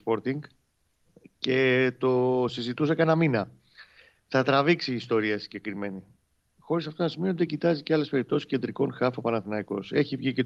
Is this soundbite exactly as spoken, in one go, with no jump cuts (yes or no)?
yes